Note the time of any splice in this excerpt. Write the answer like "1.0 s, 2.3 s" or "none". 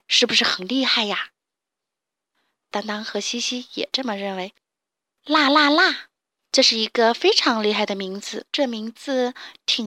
1.5 s, 4.6 s, 6.2 s, 8.5 s